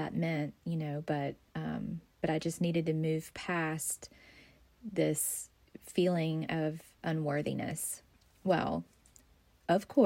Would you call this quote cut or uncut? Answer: uncut